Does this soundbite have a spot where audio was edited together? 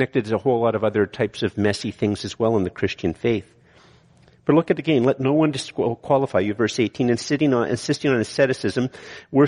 no; 0 cuts

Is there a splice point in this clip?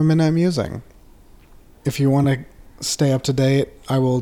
no; 0 cuts

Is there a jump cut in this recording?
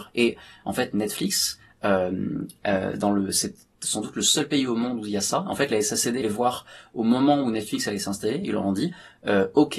yes; 1 cut; at 6.2 s

